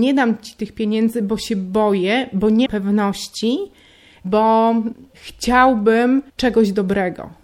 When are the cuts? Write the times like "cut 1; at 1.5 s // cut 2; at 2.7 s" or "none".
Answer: cut 1; at 2.7 s // cut 2; at 6.3 s

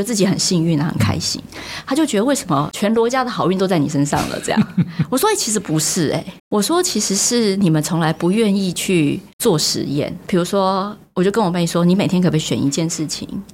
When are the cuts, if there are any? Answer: cut 1; at 6.4 s // cut 2; at 9.3 s

